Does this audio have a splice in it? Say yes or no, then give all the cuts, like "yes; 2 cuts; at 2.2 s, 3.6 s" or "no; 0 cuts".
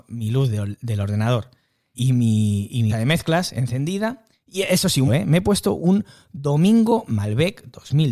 yes; 4 cuts; at 1.9 s, 2.9 s, 5.1 s, 7.1 s